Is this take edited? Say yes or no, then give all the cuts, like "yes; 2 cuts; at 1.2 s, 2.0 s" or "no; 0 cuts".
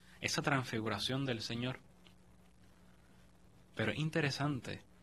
no; 0 cuts